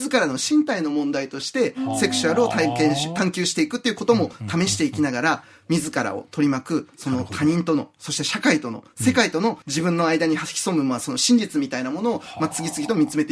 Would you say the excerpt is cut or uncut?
cut